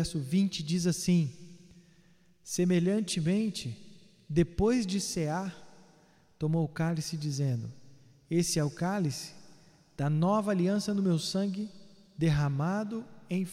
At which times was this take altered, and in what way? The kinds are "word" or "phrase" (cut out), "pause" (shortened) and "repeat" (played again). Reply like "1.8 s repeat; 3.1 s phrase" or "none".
none